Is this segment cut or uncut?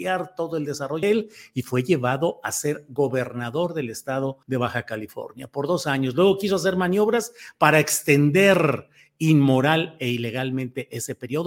cut